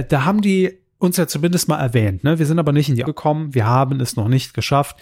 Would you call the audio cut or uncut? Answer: cut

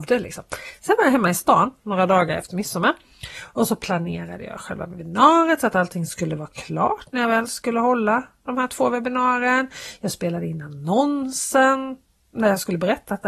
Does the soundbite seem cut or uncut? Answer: uncut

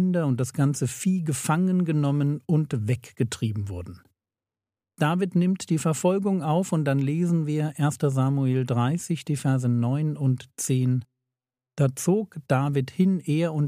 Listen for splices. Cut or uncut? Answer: uncut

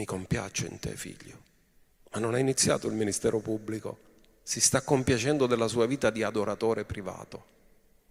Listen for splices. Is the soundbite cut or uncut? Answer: uncut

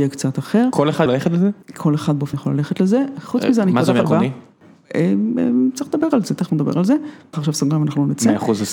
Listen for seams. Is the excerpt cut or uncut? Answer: cut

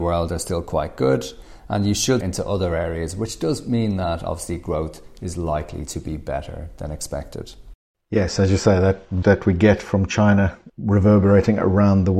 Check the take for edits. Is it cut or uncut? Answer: cut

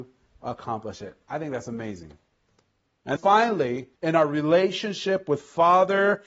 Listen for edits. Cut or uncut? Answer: cut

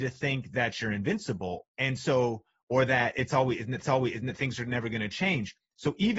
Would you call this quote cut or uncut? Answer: cut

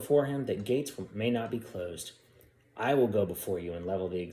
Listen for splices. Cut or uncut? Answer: uncut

